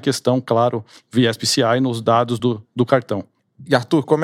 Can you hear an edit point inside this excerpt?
no; 0 cuts

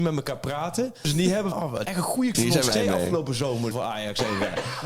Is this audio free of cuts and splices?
no; 6 cuts; at 1.0 s, 1.5 s, 1.8 s, 2.3 s, 2.7 s, 3.7 s

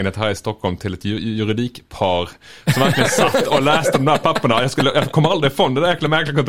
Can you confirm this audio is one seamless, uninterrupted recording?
yes; 0 cuts

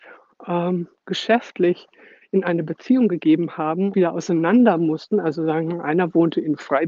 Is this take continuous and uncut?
no; 1 cut; at 3.9 s

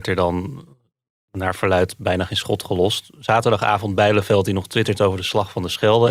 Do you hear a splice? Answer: no; 0 cuts

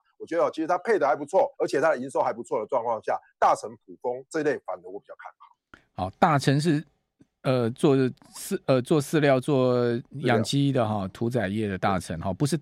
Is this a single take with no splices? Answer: no; 1 cut; at 1.5 s

